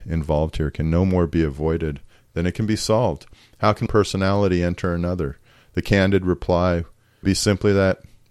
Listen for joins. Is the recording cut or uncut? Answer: cut